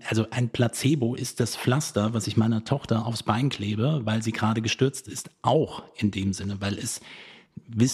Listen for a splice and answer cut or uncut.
uncut